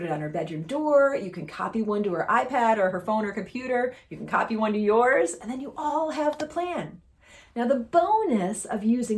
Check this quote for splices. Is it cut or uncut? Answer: uncut